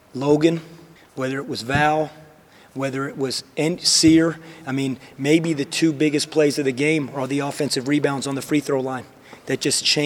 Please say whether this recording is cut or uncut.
cut